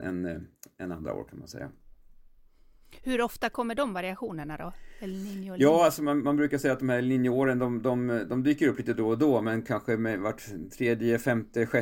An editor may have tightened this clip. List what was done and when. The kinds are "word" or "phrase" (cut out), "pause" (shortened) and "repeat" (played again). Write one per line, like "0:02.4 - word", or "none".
none